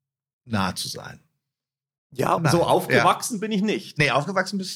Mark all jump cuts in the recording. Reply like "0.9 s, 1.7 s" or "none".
2.4 s